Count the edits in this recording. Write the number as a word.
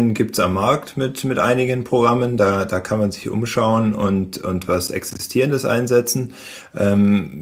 zero